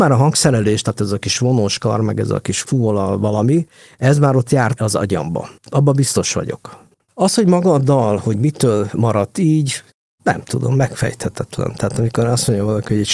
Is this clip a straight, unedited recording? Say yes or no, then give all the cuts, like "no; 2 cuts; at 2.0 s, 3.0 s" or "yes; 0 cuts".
yes; 0 cuts